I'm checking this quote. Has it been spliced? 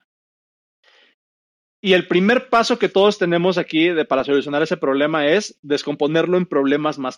no; 0 cuts

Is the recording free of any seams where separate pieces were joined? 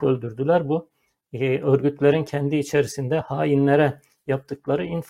yes; 0 cuts

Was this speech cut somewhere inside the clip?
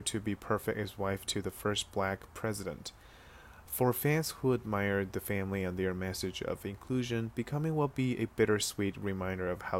no; 0 cuts

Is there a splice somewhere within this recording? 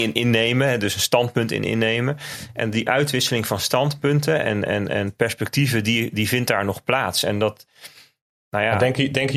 no; 0 cuts

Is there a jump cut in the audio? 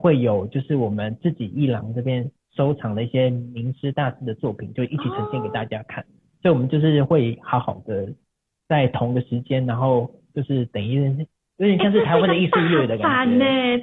no; 0 cuts

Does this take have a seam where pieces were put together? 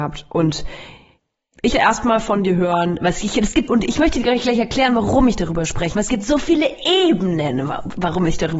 yes; 3 cuts; at 1.7 s, 3.7 s, 5.9 s

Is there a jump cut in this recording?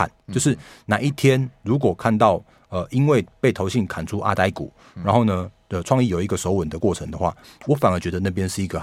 no; 0 cuts

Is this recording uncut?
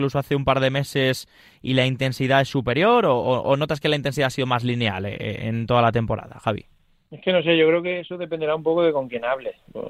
yes; 0 cuts

